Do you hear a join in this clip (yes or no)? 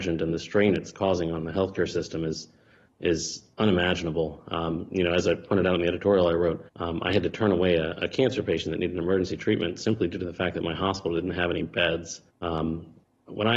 yes